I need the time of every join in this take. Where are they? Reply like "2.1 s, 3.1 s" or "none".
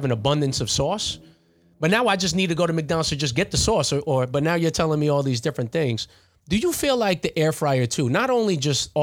none